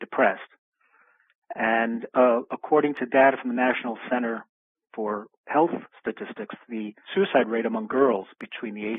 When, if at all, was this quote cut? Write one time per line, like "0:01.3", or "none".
0:07.0